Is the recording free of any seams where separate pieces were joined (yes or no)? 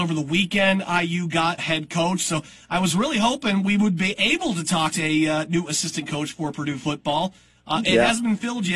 no